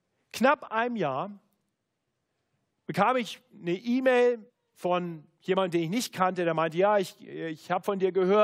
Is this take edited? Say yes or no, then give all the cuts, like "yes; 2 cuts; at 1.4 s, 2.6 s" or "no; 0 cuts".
yes; 1 cut; at 4.5 s